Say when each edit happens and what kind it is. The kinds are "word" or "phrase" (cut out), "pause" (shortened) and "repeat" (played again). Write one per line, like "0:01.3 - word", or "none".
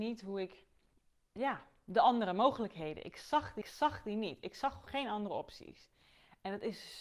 0:00.9 - pause
0:03.6 - repeat
0:04.9 - word